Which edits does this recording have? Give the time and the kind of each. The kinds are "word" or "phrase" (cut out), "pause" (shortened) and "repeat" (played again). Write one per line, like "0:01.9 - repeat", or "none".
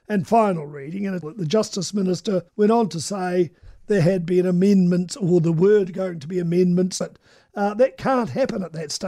0:01.2 - word
0:02.5 - pause
0:07.0 - word